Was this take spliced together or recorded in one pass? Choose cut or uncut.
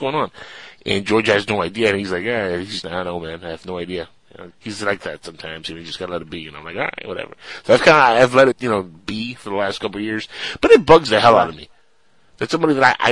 cut